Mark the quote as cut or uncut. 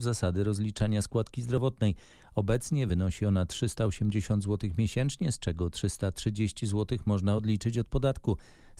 uncut